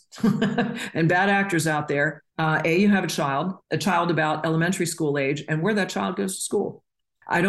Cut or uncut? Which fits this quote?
cut